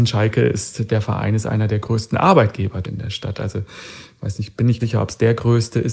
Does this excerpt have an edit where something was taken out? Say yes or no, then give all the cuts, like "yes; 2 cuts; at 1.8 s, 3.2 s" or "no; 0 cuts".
yes; 2 cuts; at 2.8 s, 4.8 s